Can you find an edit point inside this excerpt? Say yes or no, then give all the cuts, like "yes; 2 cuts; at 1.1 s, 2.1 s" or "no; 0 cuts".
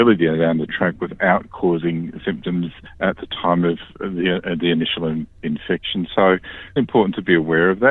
yes; 1 cut; at 6.8 s